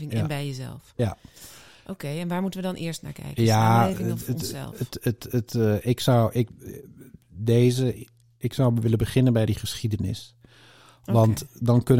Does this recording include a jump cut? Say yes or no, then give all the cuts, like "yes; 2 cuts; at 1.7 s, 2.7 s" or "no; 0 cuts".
no; 0 cuts